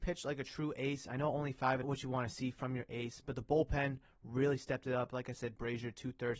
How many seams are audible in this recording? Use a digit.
1